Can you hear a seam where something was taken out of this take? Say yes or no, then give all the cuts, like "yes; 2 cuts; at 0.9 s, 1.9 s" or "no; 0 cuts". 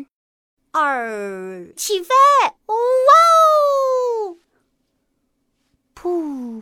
yes; 2 cuts; at 1.8 s, 2.6 s